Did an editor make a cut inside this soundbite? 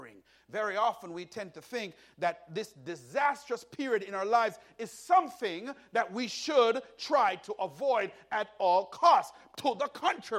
no; 0 cuts

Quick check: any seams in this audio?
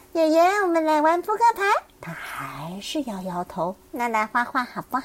yes; 2 cuts; at 1.9 s, 3.8 s

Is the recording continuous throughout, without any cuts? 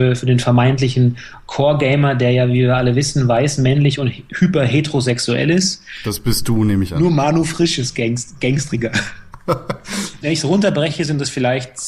no; 1 cut; at 10.2 s

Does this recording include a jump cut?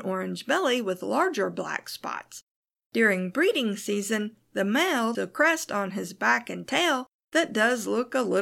yes; 1 cut; at 5.1 s

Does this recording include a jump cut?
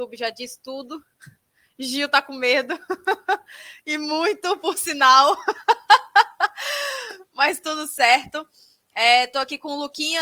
no; 0 cuts

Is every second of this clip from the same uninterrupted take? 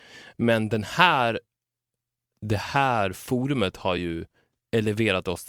yes; 0 cuts

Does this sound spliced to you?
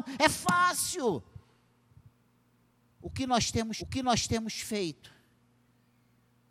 yes; 1 cut; at 3.8 s

